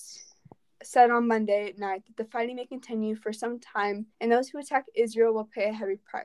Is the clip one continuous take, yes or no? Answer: no